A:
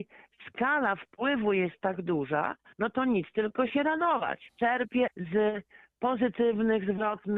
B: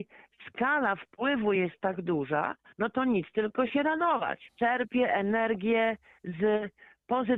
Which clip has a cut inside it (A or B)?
A